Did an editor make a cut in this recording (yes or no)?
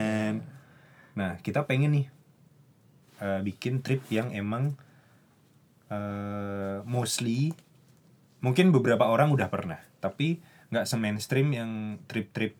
no